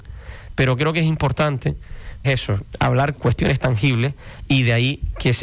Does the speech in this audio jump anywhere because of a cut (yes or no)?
yes